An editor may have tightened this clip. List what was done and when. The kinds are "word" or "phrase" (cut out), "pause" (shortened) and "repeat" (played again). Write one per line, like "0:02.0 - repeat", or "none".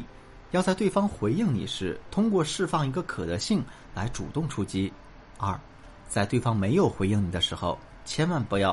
none